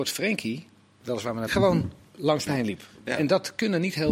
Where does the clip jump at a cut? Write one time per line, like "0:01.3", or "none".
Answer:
0:01.0
0:01.5
0:02.5